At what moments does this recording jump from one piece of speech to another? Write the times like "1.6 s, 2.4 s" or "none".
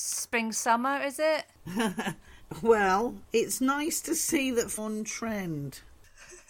4.8 s